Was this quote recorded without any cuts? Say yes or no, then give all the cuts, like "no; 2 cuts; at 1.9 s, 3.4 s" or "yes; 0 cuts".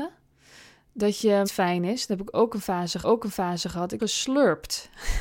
no; 3 cuts; at 1.4 s, 3.0 s, 4.0 s